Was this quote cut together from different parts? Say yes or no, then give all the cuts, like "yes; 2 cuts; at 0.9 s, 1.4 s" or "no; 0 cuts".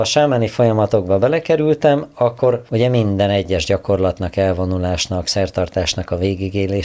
yes; 1 cut; at 2.7 s